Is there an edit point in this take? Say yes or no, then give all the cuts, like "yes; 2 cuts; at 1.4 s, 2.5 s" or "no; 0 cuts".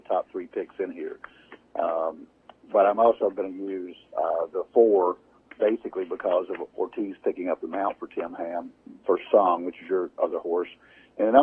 no; 0 cuts